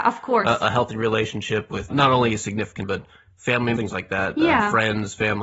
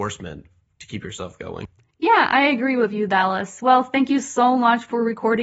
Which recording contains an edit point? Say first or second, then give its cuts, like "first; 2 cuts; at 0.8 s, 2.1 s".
first; 3 cuts; at 1.9 s, 2.8 s, 3.8 s